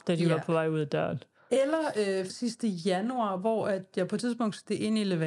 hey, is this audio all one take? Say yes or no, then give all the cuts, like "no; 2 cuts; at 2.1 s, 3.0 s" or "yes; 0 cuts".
no; 1 cut; at 2.3 s